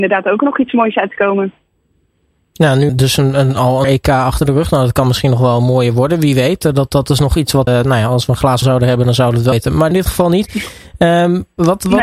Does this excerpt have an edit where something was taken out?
yes; 6 cuts; at 2.9 s, 3.8 s, 7.7 s, 8.6 s, 9.5 s, 9.9 s

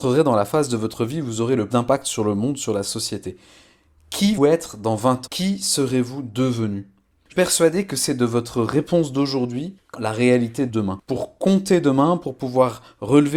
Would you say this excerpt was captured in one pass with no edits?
no; 6 cuts; at 1.7 s, 4.4 s, 5.3 s, 7.3 s, 9.9 s, 10.7 s

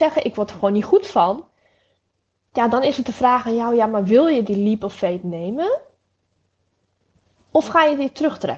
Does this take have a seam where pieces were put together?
no; 0 cuts

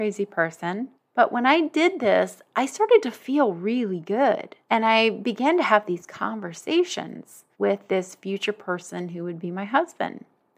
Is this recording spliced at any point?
yes; 3 cuts; at 0.9 s, 4.6 s, 7.5 s

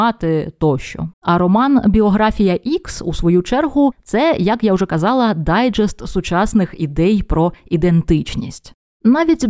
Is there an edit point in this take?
yes; 1 cut; at 1.1 s

